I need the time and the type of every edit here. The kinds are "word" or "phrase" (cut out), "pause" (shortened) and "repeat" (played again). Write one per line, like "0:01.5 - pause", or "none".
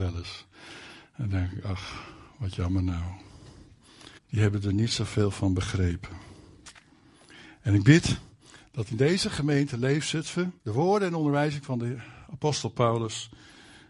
0:04.2 - pause
0:10.6 - pause